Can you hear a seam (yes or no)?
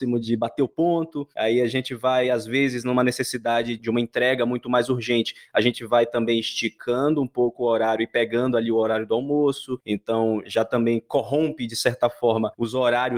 yes